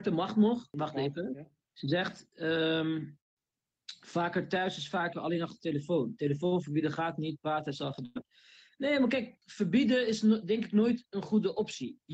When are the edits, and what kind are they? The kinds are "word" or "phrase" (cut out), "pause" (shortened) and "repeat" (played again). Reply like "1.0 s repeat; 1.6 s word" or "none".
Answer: 9.4 s pause

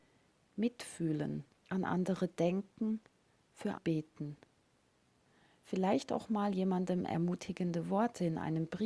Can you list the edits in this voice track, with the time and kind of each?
1.5 s pause; 3.7 s word

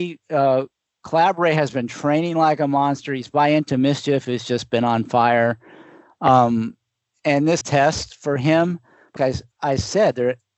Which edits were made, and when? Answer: 7.6 s phrase; 9.2 s word

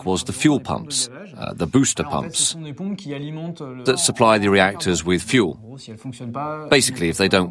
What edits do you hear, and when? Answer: 3.9 s phrase

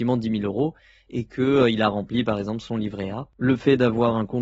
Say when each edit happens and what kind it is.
none

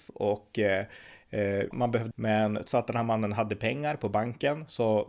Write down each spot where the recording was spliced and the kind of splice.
1.7 s word; 2.1 s word; 2.7 s word

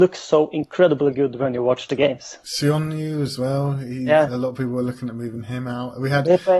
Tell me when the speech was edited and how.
none

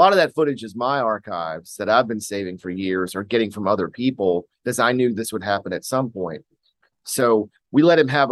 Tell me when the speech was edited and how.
none

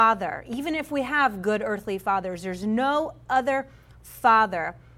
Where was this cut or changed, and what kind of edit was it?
none

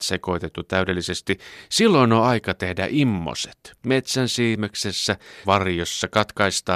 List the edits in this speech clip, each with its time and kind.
3.8 s pause; 5.4 s word

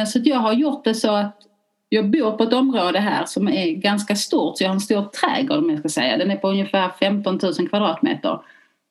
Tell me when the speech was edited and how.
none

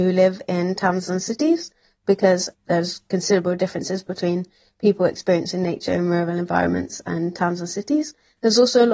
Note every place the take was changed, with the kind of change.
none

